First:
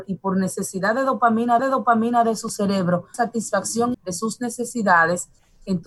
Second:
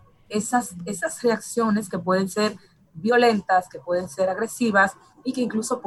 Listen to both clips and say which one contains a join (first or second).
first